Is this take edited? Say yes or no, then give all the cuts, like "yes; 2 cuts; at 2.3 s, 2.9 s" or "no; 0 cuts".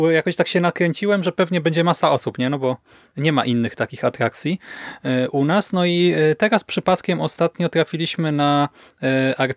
no; 0 cuts